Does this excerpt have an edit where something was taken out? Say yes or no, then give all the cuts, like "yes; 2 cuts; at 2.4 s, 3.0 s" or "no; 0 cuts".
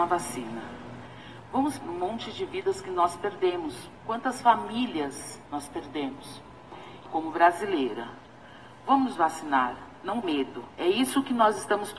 yes; 7 cuts; at 1.8 s, 4.0 s, 5.4 s, 7.0 s, 9.1 s, 10.2 s, 10.7 s